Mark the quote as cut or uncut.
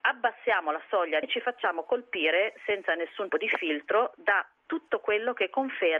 cut